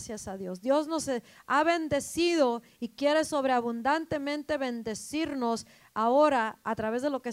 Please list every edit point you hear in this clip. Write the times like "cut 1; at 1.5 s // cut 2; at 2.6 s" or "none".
none

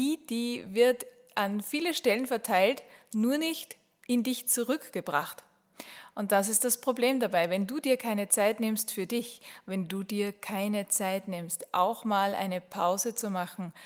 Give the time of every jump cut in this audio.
none

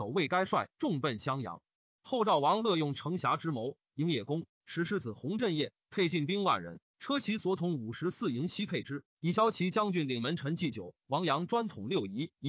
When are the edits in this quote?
none

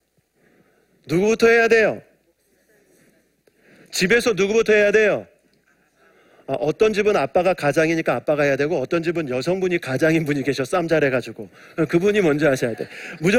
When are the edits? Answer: none

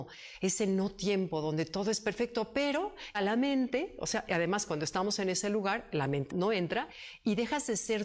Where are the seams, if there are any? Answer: cut 1; at 3.1 s // cut 2; at 6.3 s

